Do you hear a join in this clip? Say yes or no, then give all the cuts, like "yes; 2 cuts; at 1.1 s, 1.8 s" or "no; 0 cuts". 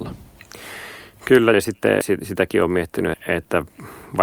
yes; 3 cuts; at 1.5 s, 2.0 s, 3.1 s